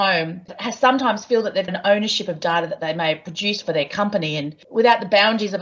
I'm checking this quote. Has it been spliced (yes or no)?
yes